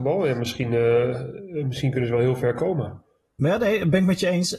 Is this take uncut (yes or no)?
yes